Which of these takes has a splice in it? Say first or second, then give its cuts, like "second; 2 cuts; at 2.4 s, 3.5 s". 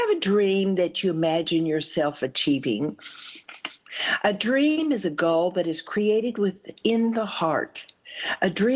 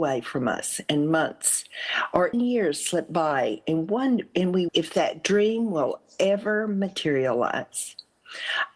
second; 2 cuts; at 2.3 s, 4.7 s